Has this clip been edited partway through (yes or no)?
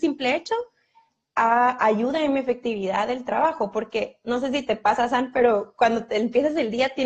no